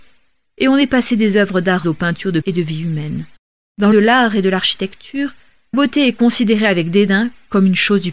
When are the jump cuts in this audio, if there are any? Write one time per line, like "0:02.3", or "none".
0:01.8
0:02.4
0:03.9
0:05.7